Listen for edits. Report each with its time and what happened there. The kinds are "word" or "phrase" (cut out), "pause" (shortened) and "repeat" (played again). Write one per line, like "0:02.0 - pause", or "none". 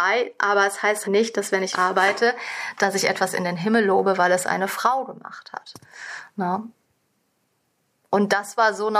0:01.0 - word
0:01.7 - word